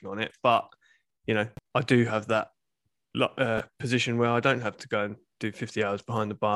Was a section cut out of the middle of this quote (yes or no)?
no